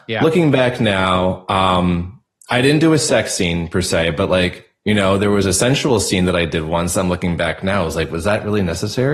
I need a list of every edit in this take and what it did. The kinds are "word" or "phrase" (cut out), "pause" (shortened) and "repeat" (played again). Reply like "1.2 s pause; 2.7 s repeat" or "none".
none